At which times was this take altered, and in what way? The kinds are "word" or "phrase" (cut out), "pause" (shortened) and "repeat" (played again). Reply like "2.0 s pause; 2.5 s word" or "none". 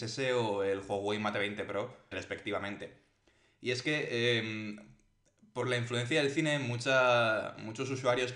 2.1 s word